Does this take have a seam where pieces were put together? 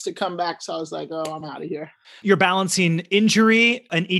no; 0 cuts

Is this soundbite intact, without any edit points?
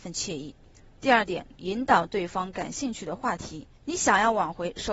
no; 2 cuts; at 1.5 s, 3.8 s

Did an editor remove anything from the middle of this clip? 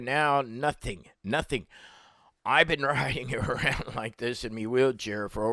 no; 0 cuts

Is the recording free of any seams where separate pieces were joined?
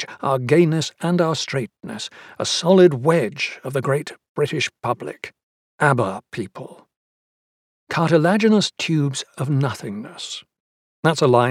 yes; 0 cuts

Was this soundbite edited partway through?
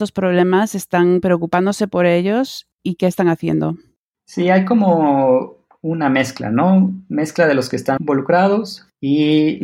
yes; 1 cut; at 8.0 s

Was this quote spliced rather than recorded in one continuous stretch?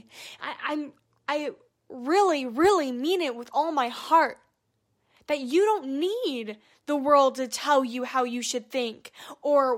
no; 0 cuts

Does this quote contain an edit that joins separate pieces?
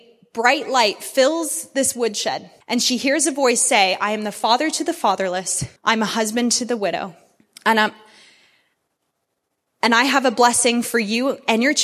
yes; 3 cuts; at 2.6 s, 5.8 s, 7.4 s

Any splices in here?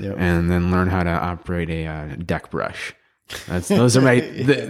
no; 0 cuts

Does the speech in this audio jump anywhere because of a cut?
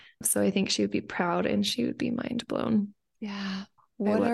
no; 0 cuts

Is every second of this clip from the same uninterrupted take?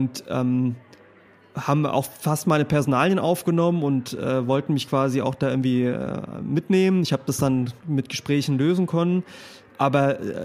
yes; 0 cuts

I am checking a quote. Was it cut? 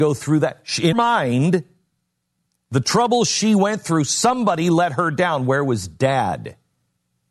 yes; 1 cut; at 0.9 s

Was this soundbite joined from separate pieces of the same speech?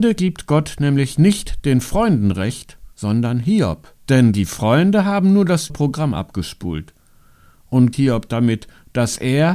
yes; 4 cuts; at 2.9 s, 4.0 s, 5.7 s, 7.9 s

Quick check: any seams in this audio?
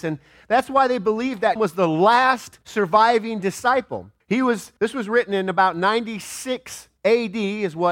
yes; 5 cuts; at 1.6 s, 2.6 s, 4.2 s, 4.8 s, 7.0 s

